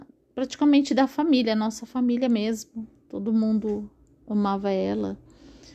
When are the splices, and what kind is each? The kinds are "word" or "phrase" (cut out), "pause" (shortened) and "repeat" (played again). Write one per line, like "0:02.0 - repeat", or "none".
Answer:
none